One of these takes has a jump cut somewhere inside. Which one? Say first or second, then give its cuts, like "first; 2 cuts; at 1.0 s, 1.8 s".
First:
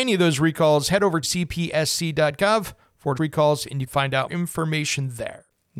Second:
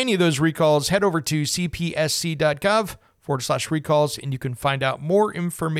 first; 4 cuts; at 1.2 s, 3.2 s, 3.9 s, 4.3 s